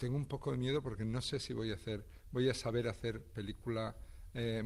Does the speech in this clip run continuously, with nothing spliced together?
yes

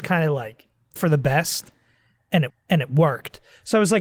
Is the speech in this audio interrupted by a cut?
yes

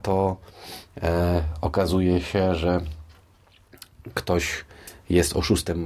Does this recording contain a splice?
no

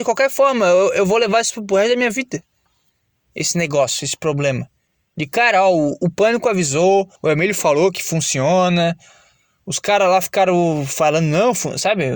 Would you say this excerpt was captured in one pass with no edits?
no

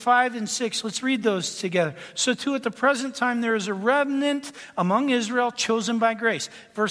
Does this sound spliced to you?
no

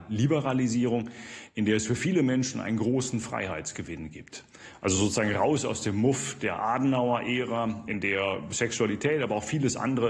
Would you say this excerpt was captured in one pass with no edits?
yes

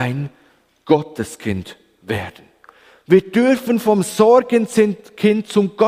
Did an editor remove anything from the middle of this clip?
no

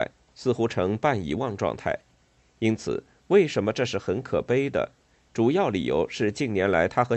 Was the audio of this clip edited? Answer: no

